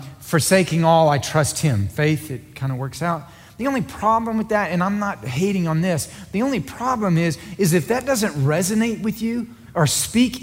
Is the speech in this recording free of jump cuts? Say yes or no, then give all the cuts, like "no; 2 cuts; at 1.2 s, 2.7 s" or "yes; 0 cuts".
yes; 0 cuts